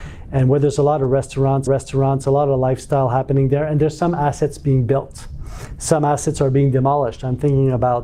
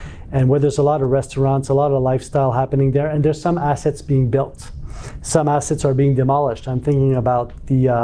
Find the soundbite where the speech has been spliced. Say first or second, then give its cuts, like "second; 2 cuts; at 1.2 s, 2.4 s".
first; 1 cut; at 1.7 s